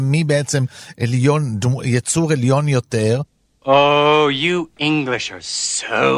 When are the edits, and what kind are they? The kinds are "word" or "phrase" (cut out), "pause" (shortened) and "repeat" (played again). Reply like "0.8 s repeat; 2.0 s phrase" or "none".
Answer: none

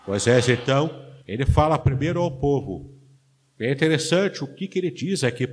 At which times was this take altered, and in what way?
1.2 s pause

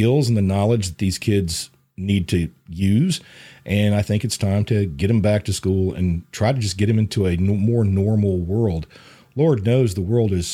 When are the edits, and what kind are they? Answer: none

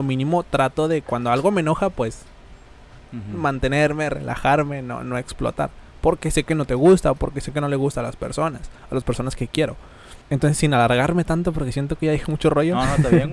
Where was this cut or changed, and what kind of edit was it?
8.8 s pause; 10.2 s pause

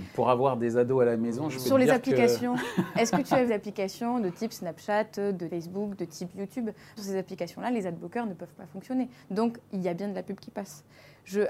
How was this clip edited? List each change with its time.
3.5 s word; 5.5 s word; 7.0 s word

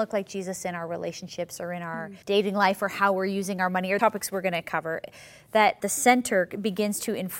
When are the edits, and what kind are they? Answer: 2.2 s pause; 4.0 s word; 5.8 s phrase

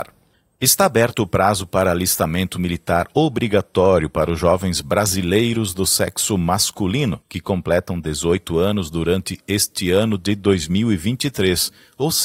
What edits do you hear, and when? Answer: 7.2 s pause

